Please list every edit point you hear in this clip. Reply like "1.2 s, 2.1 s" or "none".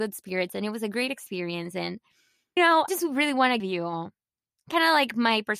2.6 s, 2.9 s, 3.6 s